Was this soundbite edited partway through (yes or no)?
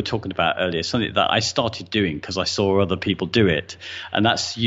no